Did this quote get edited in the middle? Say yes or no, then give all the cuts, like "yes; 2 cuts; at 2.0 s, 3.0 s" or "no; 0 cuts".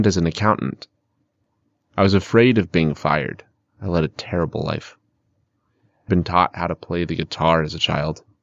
yes; 1 cut; at 6.1 s